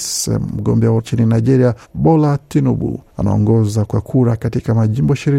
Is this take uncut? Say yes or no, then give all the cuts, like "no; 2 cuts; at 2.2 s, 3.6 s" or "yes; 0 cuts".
no; 3 cuts; at 1.0 s, 1.8 s, 3.1 s